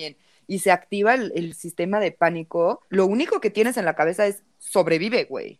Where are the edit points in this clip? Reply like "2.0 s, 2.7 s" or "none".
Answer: 2.9 s